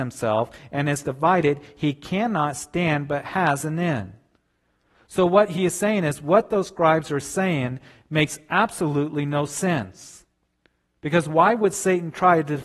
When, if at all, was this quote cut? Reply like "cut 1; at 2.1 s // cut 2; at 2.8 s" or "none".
none